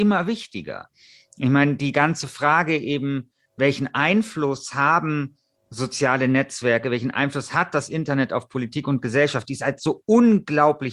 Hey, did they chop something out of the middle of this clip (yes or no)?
no